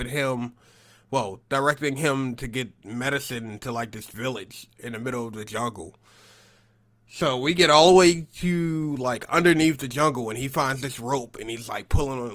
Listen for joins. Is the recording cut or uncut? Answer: uncut